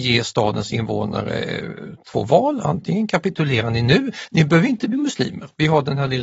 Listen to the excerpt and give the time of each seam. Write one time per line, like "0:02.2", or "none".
none

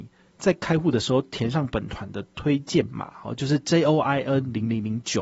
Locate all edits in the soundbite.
none

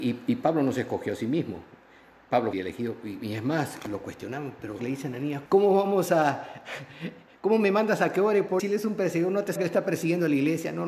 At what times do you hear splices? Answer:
0:02.5
0:04.8
0:05.5
0:08.6
0:09.6

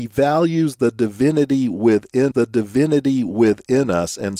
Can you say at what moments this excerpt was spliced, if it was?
0:02.3

